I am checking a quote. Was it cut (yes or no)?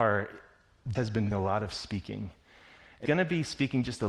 yes